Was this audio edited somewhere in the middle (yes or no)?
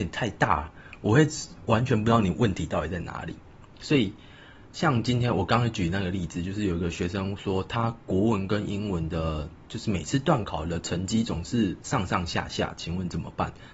no